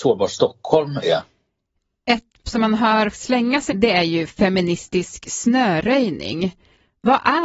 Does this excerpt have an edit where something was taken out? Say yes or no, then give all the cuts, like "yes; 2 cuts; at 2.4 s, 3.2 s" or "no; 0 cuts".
yes; 3 cuts; at 2.4 s, 3.1 s, 3.7 s